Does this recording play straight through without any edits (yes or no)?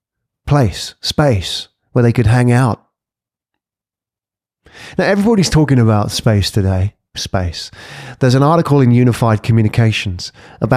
no